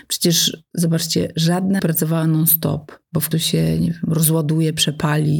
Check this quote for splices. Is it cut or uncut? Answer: cut